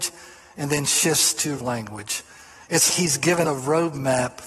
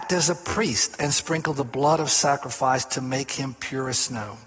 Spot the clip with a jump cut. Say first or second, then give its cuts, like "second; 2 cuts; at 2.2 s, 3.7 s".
first; 3 cuts; at 1.6 s, 2.9 s, 3.5 s